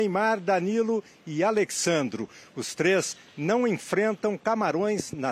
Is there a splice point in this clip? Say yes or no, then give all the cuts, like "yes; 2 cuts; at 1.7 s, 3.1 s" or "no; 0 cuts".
no; 0 cuts